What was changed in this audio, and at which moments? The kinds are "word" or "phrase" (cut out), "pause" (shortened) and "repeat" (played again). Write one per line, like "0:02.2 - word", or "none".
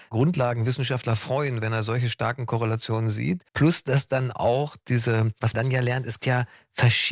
0:03.5 - pause
0:05.5 - word
0:06.2 - word